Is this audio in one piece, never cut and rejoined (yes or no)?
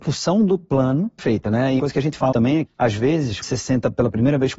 no